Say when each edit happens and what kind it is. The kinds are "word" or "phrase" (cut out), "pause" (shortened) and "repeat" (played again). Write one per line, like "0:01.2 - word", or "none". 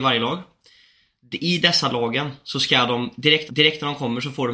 0:03.5 - repeat